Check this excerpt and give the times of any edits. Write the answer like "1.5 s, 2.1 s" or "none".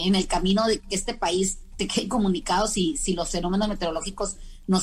1.8 s

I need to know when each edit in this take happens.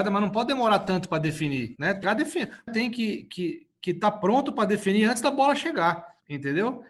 2.0 s, 2.7 s

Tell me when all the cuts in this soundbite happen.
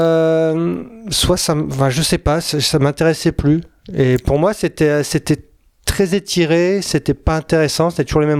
none

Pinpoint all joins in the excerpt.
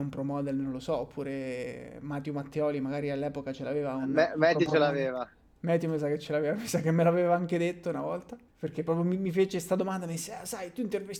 none

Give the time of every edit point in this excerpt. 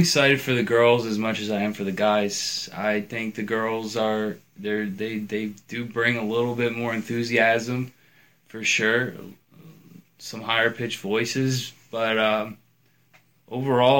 none

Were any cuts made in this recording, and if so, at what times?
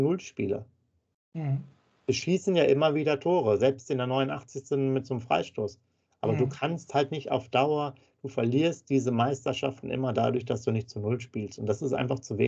none

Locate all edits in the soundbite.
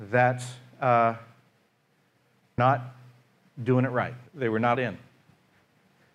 2.6 s, 4.3 s, 4.7 s

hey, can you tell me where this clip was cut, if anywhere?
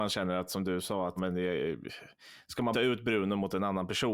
1.2 s, 2.7 s

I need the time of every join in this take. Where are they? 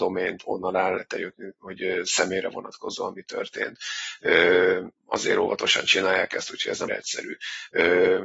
5.0 s, 6.9 s

